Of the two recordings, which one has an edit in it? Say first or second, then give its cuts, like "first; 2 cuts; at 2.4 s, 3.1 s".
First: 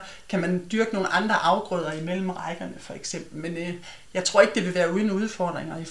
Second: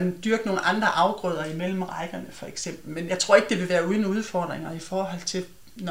second; 1 cut; at 3.1 s